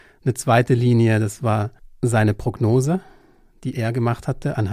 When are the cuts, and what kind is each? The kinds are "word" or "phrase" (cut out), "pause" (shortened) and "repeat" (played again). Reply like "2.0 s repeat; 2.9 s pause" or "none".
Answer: none